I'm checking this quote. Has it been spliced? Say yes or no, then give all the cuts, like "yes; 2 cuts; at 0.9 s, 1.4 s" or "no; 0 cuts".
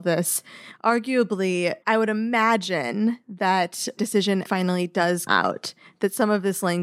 yes; 4 cuts; at 1.8 s, 4.0 s, 4.4 s, 5.3 s